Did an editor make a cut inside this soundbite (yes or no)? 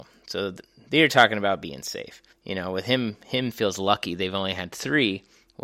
yes